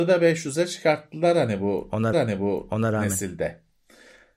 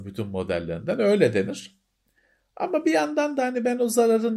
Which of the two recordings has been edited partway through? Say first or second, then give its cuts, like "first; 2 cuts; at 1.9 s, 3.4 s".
first; 1 cut; at 2.1 s